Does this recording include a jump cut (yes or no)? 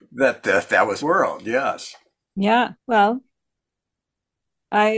yes